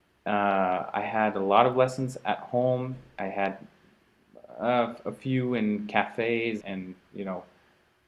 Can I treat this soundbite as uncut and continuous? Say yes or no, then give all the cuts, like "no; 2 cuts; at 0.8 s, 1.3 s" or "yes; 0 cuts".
no; 1 cut; at 6.6 s